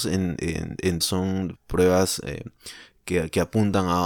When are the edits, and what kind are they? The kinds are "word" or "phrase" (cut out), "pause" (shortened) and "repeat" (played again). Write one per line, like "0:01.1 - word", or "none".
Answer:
0:01.0 - word
0:01.5 - phrase